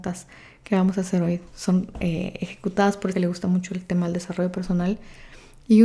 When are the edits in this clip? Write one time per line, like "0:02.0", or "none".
0:03.1